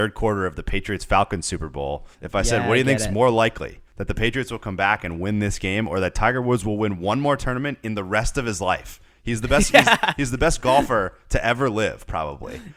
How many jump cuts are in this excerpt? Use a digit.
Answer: 2